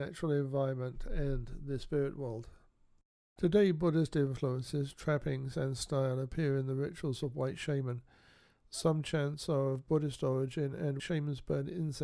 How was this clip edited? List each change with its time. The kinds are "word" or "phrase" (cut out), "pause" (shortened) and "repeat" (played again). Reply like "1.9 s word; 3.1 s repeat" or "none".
11.0 s word